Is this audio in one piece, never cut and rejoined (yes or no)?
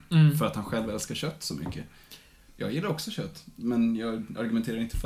yes